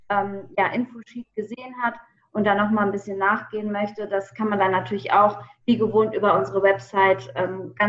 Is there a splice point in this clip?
no; 0 cuts

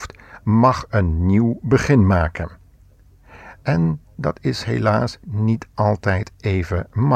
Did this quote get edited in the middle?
yes; 1 cut; at 4.1 s

